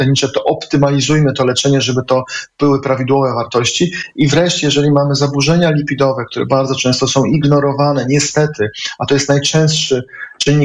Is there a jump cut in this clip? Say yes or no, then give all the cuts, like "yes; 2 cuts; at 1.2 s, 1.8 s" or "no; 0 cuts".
no; 0 cuts